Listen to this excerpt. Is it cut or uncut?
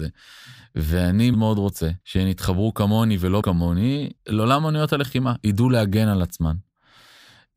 cut